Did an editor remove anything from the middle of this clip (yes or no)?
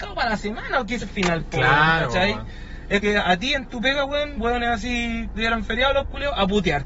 yes